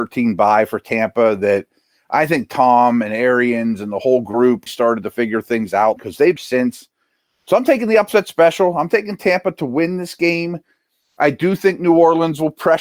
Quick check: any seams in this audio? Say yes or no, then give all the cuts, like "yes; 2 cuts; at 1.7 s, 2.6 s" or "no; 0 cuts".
yes; 3 cuts; at 4.7 s, 6.0 s, 6.4 s